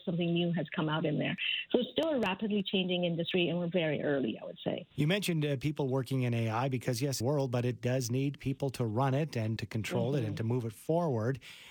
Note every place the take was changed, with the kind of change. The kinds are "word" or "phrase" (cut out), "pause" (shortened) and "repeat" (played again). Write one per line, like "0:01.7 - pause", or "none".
0:04.9 - pause
0:07.2 - phrase
0:09.6 - word

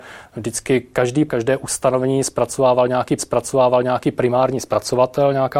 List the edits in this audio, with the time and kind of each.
0:01.3 - word
0:03.2 - repeat

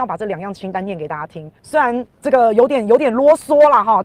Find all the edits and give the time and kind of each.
0:01.6 - pause
0:02.1 - pause

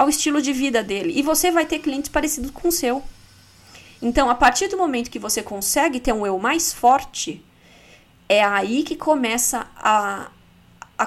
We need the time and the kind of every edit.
none

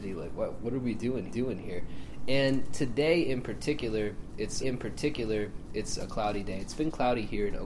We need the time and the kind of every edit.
0:01.3 - repeat
0:04.6 - repeat

